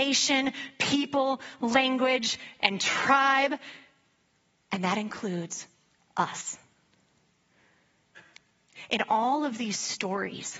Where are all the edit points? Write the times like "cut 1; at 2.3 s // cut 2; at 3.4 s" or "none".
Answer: none